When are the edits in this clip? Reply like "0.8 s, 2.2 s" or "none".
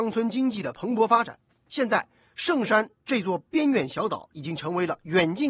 none